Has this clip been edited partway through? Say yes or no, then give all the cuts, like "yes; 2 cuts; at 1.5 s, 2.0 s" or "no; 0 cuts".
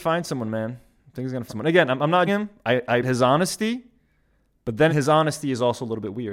yes; 4 cuts; at 1.5 s, 2.3 s, 3.0 s, 4.9 s